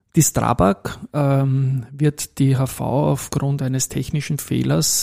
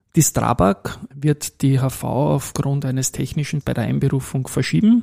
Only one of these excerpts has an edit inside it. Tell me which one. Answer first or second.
second